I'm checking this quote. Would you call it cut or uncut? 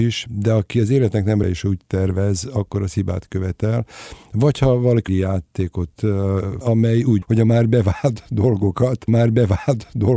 cut